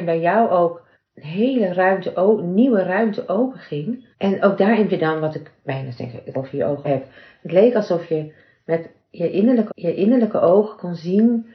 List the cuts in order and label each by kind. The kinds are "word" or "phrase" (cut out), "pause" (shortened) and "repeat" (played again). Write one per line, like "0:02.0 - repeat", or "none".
0:00.9 - pause
0:04.1 - pause
0:04.9 - word
0:06.3 - word
0:06.8 - word
0:09.7 - repeat